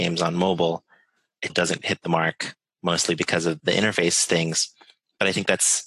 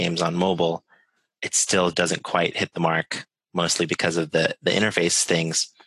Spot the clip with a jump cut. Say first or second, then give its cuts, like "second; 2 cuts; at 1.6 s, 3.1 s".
first; 3 cuts; at 1.5 s, 1.8 s, 3.6 s